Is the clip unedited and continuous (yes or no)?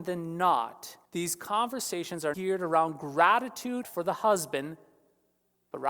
no